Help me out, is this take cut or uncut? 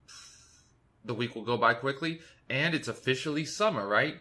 uncut